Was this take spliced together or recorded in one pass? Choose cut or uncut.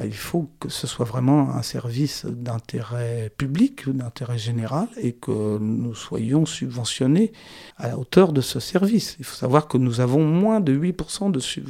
cut